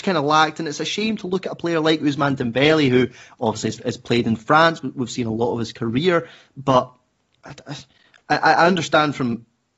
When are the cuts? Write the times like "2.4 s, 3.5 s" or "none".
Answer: none